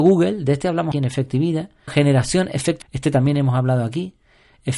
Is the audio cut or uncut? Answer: cut